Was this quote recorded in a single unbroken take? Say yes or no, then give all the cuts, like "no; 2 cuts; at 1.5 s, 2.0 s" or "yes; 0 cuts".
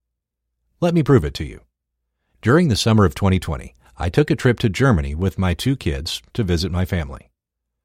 yes; 0 cuts